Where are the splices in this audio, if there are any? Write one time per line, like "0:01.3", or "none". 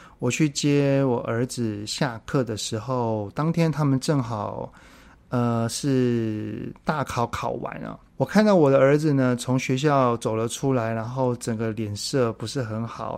0:08.1